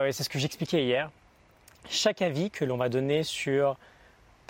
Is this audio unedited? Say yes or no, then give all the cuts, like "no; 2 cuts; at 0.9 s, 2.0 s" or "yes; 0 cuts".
yes; 0 cuts